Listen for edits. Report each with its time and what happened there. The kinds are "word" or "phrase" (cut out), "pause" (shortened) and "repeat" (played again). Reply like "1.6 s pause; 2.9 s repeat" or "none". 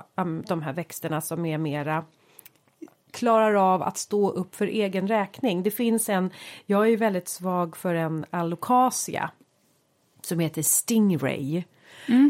none